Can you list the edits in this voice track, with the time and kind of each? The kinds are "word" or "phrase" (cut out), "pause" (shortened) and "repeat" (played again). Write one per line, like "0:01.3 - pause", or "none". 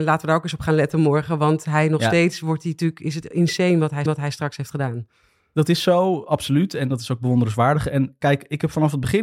0:04.1 - repeat